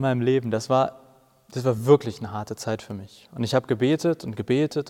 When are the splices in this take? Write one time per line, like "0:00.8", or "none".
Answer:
none

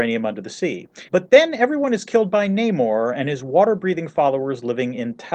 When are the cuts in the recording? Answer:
0:01.1

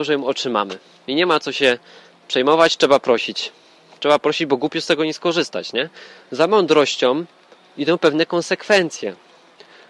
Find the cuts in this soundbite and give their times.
none

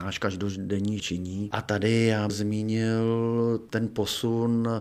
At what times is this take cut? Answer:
0:01.0
0:02.3

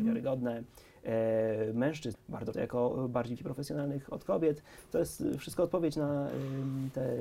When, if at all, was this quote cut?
0:02.1
0:02.5
0:03.4

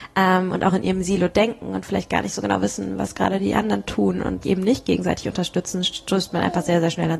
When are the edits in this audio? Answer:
0:04.4

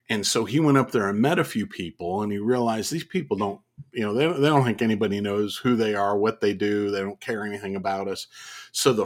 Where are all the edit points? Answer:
none

